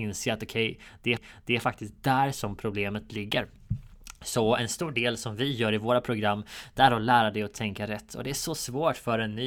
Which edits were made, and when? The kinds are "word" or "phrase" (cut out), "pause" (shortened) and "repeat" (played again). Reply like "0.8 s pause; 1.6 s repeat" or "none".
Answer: 1.2 s repeat